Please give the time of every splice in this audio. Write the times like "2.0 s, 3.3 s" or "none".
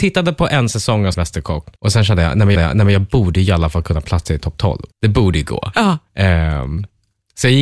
1.1 s, 1.8 s, 2.6 s, 4.9 s